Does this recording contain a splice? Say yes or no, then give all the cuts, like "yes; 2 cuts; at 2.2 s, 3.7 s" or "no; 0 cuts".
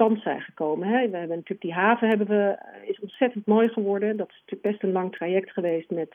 no; 0 cuts